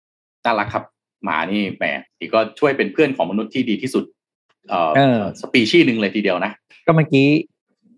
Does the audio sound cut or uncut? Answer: cut